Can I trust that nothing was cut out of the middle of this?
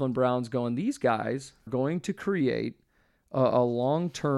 no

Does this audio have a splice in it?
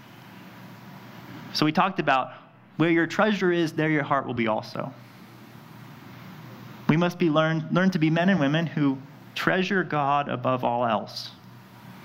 no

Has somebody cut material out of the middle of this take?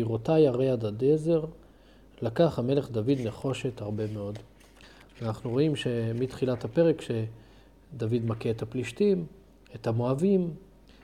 no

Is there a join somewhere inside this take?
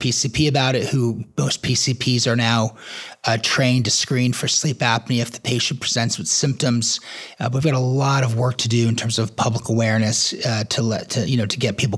no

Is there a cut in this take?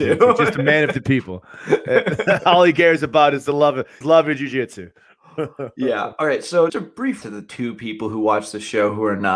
yes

